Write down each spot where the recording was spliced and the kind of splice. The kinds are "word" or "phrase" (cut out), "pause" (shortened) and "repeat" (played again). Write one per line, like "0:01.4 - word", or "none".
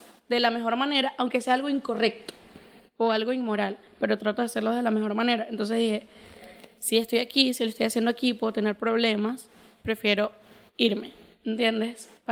none

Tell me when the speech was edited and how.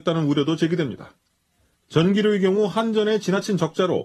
none

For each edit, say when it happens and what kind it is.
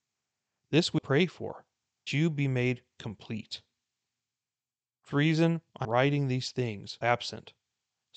0:01.0 - word
0:02.1 - word
0:05.1 - word
0:05.8 - word
0:07.0 - word

